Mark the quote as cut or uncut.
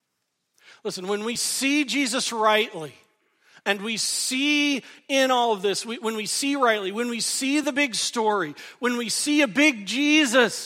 uncut